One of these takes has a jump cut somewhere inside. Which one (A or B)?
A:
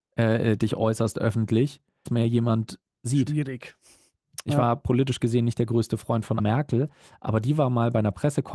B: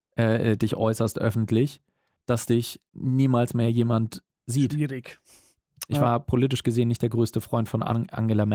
A